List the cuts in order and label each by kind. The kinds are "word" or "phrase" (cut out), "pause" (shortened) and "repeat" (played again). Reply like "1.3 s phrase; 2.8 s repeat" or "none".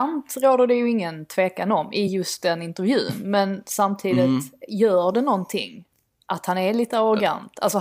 none